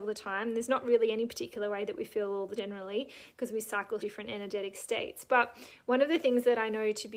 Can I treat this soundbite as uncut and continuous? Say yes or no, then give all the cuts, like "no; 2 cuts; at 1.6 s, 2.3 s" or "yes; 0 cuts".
no; 2 cuts; at 2.6 s, 4.0 s